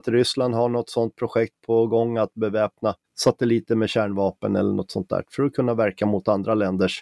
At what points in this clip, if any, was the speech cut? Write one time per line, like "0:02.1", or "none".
0:03.0